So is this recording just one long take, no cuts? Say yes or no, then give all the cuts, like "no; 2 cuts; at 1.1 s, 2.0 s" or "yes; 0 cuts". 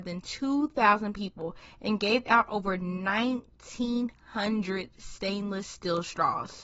yes; 0 cuts